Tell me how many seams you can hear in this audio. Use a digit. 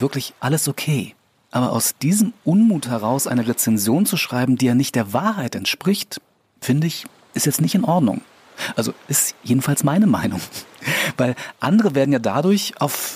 0